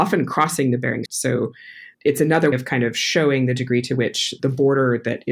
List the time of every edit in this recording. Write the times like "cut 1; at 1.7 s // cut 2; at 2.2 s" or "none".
cut 1; at 1.1 s // cut 2; at 1.9 s // cut 3; at 2.5 s // cut 4; at 4.4 s